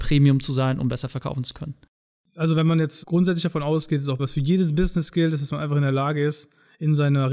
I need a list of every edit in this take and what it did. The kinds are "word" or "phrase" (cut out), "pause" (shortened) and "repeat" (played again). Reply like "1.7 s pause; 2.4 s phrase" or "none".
3.0 s word; 4.2 s word